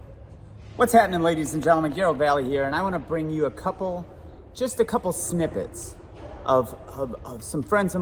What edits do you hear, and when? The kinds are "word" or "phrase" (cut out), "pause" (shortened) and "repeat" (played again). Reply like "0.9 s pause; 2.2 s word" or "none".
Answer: none

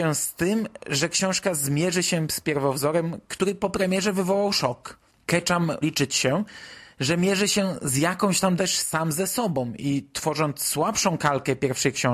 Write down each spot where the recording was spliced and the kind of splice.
5.8 s word; 8.6 s phrase

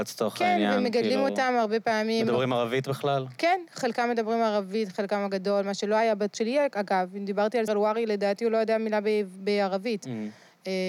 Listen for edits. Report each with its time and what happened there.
6.3 s word; 7.7 s word

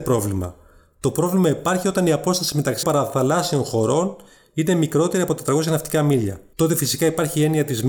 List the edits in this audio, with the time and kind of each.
2.8 s word

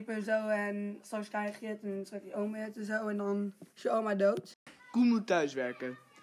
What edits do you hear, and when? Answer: 3.7 s pause; 4.8 s pause

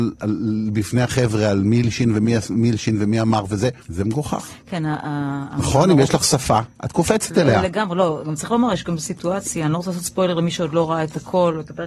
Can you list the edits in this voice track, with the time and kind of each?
3.8 s pause

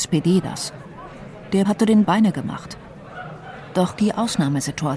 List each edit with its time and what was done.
1.6 s word; 2.0 s word; 4.0 s phrase

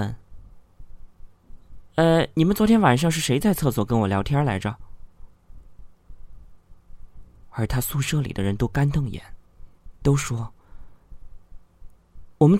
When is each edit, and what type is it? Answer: 9.9 s pause

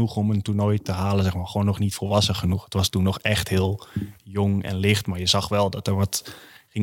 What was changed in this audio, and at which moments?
none

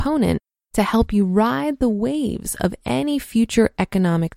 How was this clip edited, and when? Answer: none

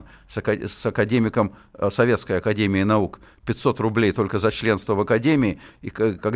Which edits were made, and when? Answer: none

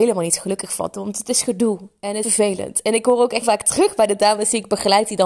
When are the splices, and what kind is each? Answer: 2.2 s word; 3.4 s word

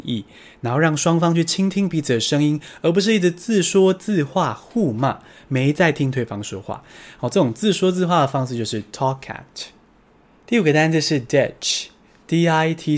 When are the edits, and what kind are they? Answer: none

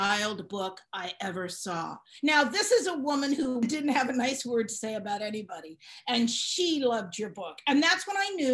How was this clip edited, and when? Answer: none

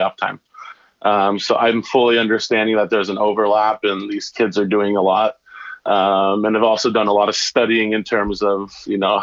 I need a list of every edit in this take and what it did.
none

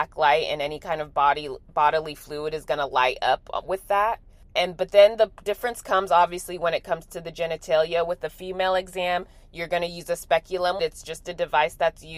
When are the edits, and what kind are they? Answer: none

